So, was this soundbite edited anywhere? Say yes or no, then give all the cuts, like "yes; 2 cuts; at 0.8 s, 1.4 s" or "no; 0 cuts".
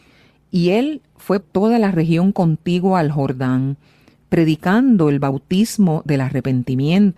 yes; 1 cut; at 1.4 s